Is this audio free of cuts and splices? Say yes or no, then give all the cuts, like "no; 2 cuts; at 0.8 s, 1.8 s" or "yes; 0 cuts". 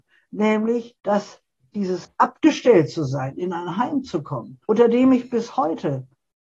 no; 2 cuts; at 1.0 s, 4.6 s